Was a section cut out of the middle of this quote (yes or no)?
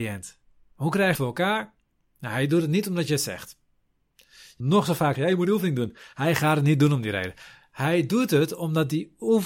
yes